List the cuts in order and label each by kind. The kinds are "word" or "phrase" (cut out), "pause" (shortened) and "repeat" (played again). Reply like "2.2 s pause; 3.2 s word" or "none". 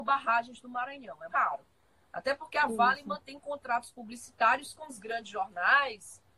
1.3 s word